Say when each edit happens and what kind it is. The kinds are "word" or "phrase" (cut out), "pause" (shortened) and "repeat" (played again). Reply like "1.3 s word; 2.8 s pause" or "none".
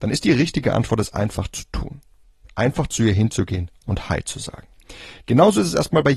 none